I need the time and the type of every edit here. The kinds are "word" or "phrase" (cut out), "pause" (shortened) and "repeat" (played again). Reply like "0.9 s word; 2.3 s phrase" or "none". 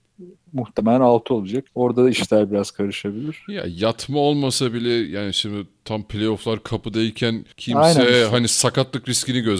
1.7 s pause; 7.5 s pause